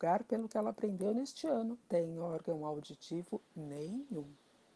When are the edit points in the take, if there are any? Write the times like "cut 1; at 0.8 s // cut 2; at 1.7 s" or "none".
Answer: cut 1; at 1.8 s

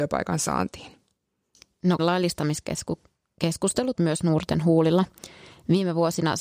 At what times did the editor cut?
cut 1; at 2.0 s // cut 2; at 3.9 s

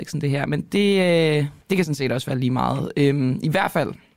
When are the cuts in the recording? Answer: cut 1; at 1.6 s

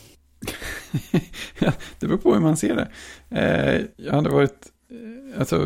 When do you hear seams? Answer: cut 1; at 3.9 s

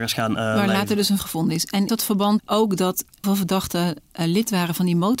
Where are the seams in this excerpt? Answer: cut 1; at 1.2 s // cut 2; at 1.9 s // cut 3; at 2.4 s // cut 4; at 3.2 s

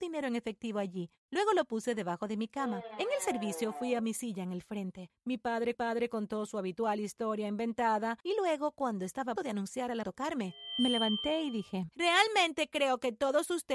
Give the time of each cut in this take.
cut 1; at 5.7 s // cut 2; at 8.2 s // cut 3; at 9.4 s // cut 4; at 10.0 s

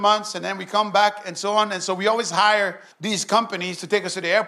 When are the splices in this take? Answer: cut 1; at 2.9 s

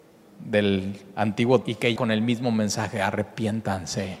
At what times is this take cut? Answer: cut 1; at 1.6 s // cut 2; at 2.0 s

